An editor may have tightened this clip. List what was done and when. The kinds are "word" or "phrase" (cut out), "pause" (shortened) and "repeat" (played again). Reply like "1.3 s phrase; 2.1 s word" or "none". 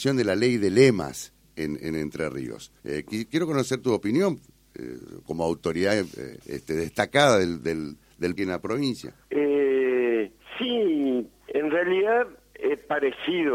2.8 s pause; 5.3 s word; 6.4 s pause; 8.4 s phrase; 9.2 s pause; 11.5 s word